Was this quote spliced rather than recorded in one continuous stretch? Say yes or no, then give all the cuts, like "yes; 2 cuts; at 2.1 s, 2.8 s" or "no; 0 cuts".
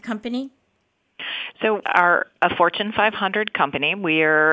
yes; 1 cut; at 1.8 s